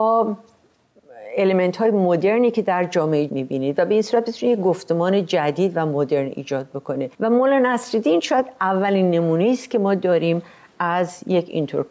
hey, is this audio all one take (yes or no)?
no